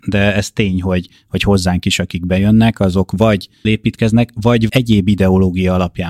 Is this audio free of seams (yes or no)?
no